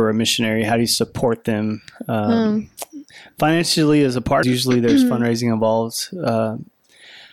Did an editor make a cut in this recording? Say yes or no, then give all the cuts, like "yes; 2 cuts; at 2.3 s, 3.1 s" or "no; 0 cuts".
yes; 1 cut; at 4.4 s